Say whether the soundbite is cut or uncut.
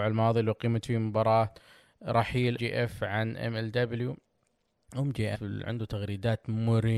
cut